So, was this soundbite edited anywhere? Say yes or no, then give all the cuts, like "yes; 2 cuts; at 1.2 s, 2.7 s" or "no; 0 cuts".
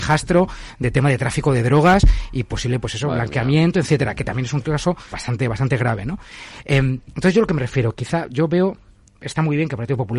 yes; 1 cut; at 5.1 s